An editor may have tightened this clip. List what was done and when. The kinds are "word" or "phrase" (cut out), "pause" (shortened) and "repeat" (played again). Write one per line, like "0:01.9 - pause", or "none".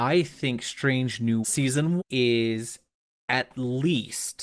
0:01.4 - word
0:02.0 - word